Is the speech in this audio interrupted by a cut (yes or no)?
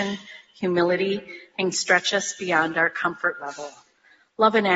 yes